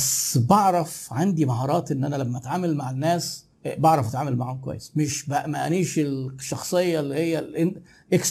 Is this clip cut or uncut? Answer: cut